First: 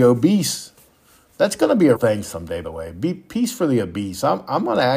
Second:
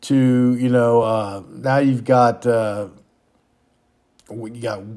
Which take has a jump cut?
first; 2 cuts; at 2.0 s, 2.6 s

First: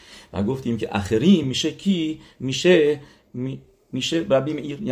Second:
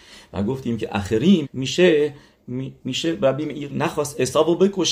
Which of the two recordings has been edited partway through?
second; 3 cuts; at 1.4 s, 2.8 s, 3.7 s

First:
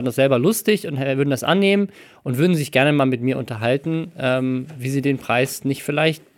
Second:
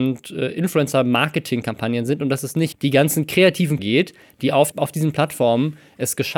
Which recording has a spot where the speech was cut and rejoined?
second; 3 cuts; at 2.7 s, 3.8 s, 4.7 s

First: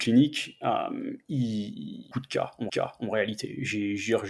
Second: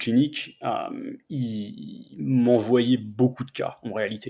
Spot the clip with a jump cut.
first; 2 cuts; at 2.1 s, 2.7 s

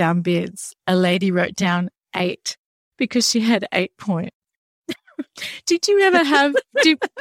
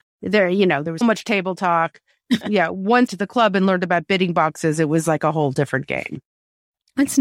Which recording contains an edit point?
second; 3 cuts; at 1.0 s, 2.4 s, 3.1 s

